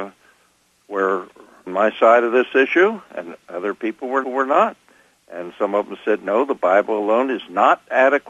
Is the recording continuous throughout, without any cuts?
no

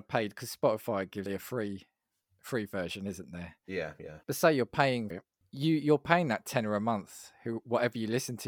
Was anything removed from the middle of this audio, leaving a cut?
yes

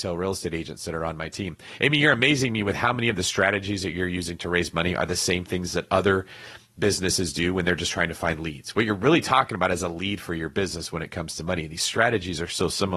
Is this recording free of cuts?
yes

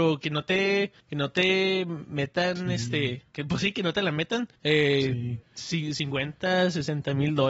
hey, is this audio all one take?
no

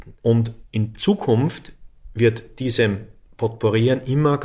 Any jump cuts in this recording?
no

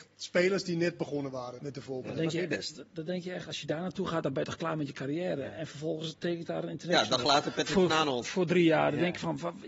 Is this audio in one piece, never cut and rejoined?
no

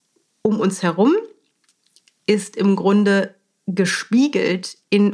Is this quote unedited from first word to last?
yes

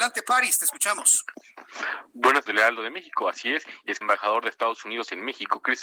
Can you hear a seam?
yes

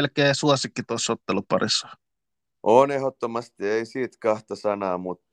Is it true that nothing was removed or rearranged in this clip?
yes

